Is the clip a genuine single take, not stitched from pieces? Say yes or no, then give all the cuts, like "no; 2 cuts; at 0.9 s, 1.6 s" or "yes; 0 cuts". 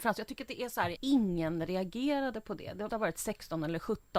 no; 2 cuts; at 1.0 s, 2.9 s